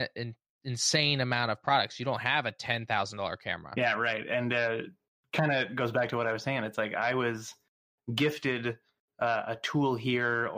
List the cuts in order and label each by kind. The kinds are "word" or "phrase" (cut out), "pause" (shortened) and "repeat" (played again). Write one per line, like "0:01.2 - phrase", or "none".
none